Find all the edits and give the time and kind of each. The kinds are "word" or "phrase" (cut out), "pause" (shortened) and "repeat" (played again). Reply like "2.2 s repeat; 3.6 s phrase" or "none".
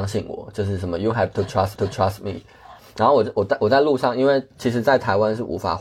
1.8 s repeat